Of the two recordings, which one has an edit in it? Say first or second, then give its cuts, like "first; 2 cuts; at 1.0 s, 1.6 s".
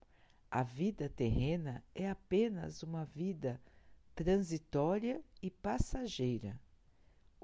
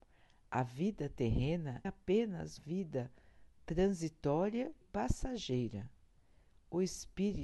second; 3 cuts; at 1.8 s, 2.6 s, 4.8 s